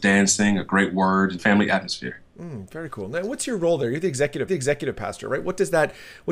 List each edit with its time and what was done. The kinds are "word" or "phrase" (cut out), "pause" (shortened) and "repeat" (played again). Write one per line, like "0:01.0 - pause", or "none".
0:01.4 - phrase
0:04.5 - repeat